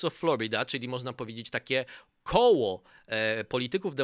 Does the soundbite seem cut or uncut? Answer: uncut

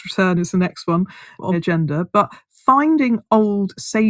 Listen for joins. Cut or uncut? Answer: cut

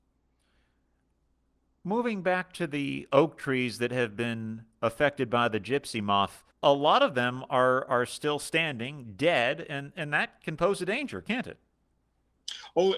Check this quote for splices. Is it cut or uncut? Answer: cut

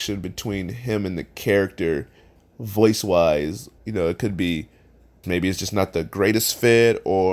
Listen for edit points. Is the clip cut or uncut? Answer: cut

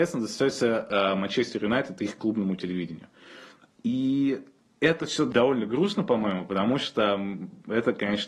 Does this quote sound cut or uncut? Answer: uncut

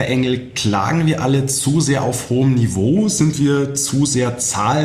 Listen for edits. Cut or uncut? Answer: uncut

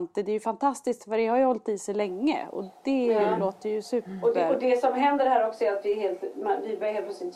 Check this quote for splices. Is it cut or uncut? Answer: uncut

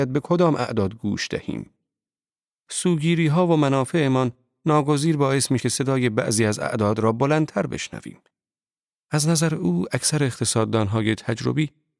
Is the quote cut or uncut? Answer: cut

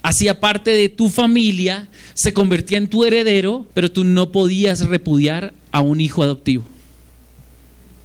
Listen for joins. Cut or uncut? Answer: cut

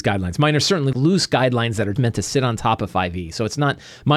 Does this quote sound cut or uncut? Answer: cut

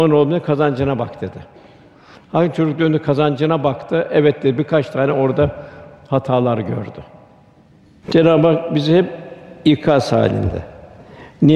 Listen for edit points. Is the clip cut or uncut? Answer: uncut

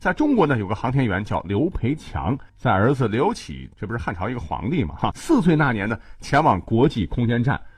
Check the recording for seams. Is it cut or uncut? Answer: cut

